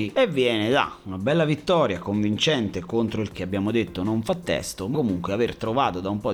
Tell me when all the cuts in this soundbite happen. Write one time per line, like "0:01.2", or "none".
0:03.3
0:04.9